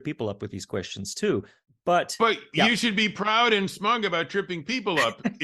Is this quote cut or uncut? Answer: uncut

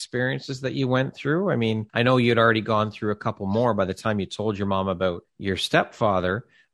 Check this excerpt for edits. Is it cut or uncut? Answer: cut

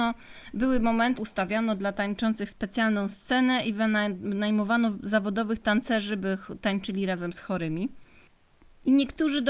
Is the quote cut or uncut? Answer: cut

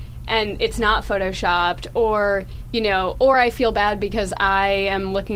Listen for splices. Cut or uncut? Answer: uncut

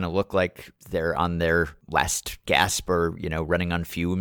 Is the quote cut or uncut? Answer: uncut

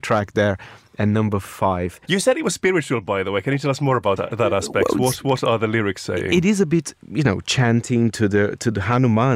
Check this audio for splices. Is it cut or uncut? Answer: cut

